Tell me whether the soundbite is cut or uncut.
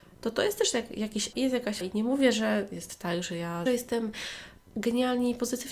cut